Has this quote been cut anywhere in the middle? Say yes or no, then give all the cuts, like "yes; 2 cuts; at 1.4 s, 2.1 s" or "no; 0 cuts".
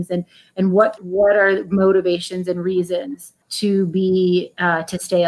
yes; 2 cuts; at 1.0 s, 3.4 s